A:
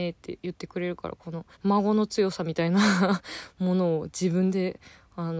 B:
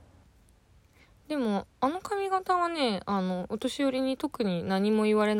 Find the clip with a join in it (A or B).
A